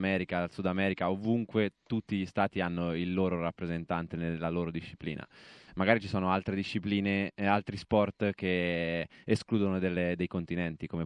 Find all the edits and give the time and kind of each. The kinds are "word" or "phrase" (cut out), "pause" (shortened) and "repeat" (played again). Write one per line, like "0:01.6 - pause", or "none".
none